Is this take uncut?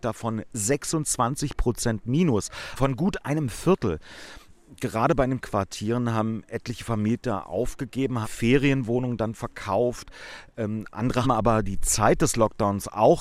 no; 4 cuts; at 2.8 s, 5.4 s, 8.2 s, 11.2 s

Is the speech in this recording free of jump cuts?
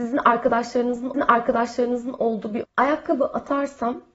no; 2 cuts; at 1.1 s, 2.6 s

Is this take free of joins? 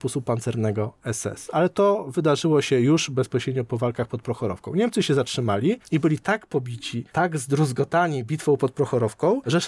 yes; 0 cuts

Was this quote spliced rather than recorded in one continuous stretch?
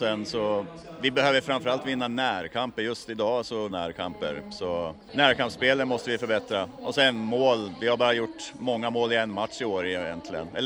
yes; 1 cut; at 3.7 s

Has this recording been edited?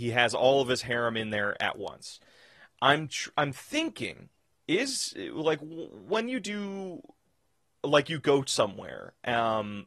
no; 0 cuts

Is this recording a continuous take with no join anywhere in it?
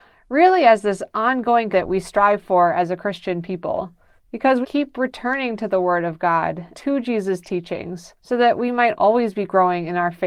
no; 5 cuts; at 1.7 s, 4.2 s, 4.6 s, 6.7 s, 8.2 s

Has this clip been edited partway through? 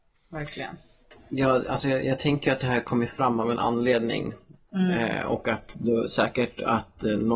no; 0 cuts

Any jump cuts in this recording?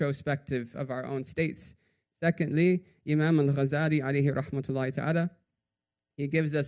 no; 0 cuts

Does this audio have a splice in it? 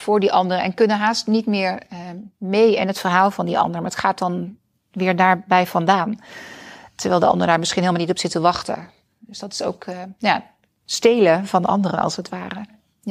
no; 0 cuts

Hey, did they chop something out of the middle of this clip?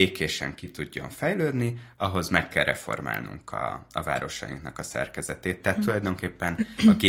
no; 0 cuts

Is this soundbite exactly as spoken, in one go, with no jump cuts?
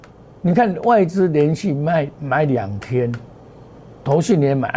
yes; 0 cuts

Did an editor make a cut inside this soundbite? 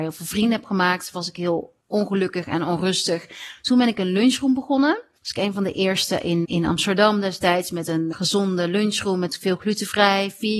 yes; 4 cuts; at 1.8 s, 5.2 s, 6.4 s, 8.1 s

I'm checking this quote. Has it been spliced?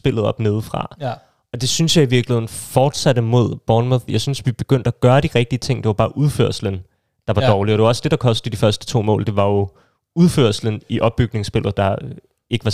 no; 0 cuts

